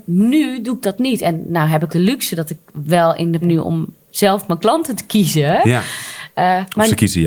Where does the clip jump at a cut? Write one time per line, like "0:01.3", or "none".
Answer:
0:01.9
0:02.7
0:03.4